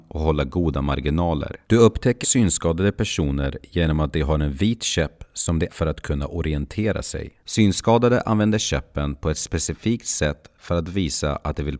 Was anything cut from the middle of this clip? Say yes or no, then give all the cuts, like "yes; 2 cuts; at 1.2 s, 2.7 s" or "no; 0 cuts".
yes; 4 cuts; at 1.6 s, 2.2 s, 5.7 s, 7.4 s